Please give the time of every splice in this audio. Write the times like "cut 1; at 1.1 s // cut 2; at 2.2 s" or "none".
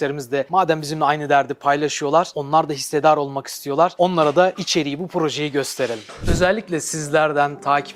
none